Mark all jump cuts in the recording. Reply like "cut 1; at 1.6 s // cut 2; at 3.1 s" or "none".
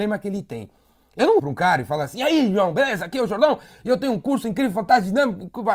cut 1; at 1.4 s